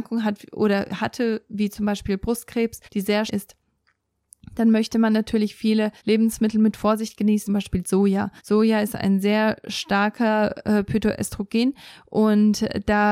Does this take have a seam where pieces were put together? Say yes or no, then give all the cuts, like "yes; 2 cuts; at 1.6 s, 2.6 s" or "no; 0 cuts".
yes; 5 cuts; at 2.8 s, 3.3 s, 6.0 s, 7.5 s, 8.4 s